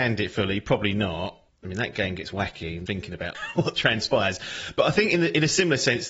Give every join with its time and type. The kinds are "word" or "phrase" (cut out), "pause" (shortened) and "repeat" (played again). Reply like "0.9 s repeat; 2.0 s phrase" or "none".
1.5 s pause; 2.9 s word; 3.3 s phrase